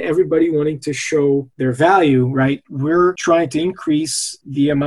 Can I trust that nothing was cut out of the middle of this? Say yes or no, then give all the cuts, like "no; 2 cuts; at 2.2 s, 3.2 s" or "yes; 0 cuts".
yes; 0 cuts